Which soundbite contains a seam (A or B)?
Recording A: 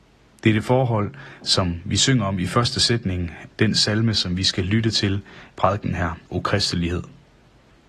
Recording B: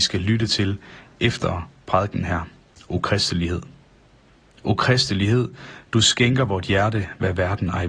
A